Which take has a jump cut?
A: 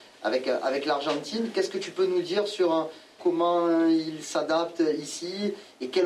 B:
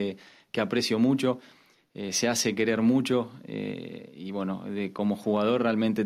A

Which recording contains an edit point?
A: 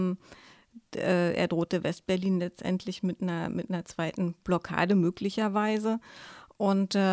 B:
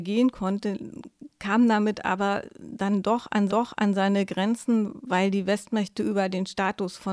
B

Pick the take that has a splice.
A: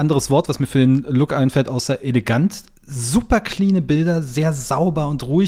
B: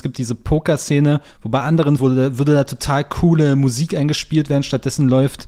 B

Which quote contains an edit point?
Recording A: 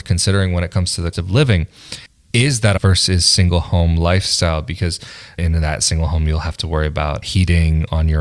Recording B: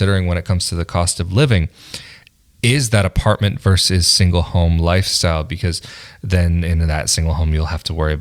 A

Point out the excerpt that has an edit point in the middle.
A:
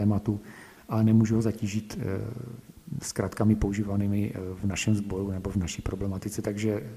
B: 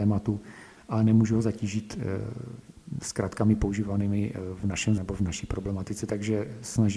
B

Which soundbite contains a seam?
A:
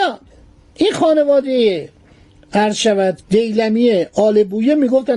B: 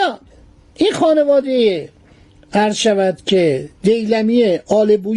A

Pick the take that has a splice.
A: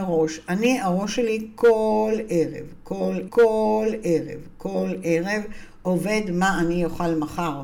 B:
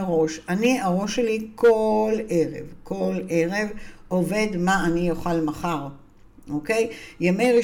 A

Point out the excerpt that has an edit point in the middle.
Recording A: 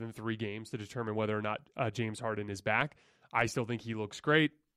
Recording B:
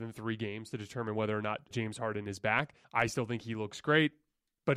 B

